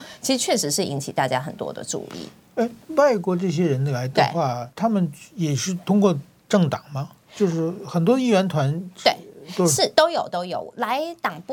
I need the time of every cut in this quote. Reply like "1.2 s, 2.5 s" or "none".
4.7 s